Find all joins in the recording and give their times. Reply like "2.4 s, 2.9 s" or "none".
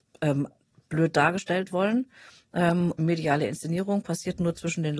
1.7 s, 3.0 s